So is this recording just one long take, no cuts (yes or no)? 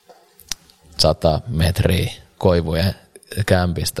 yes